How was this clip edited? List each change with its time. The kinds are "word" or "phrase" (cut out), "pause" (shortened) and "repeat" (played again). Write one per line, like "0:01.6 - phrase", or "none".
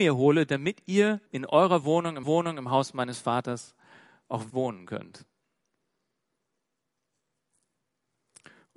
0:01.3 - pause
0:02.2 - repeat
0:04.5 - word